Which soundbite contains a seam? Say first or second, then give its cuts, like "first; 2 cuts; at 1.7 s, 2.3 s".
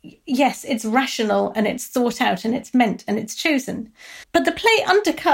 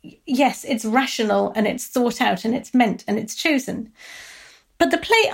first; 1 cut; at 4.2 s